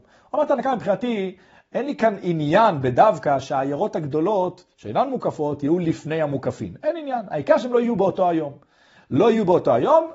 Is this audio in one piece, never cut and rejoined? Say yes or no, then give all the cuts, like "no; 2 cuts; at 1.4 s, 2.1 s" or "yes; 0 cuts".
yes; 0 cuts